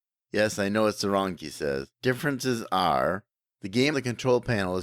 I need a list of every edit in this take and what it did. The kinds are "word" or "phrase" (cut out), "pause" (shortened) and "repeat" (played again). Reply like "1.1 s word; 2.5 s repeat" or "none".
1.4 s word; 1.9 s pause; 3.4 s pause; 3.9 s word